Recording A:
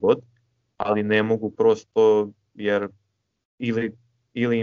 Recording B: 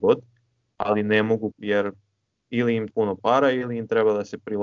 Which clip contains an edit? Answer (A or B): B